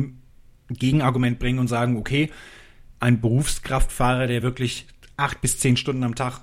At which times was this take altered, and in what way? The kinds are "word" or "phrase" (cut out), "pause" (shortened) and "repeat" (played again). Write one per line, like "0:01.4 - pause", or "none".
none